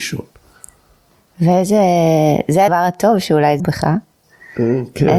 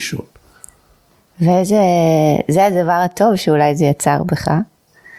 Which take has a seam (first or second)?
first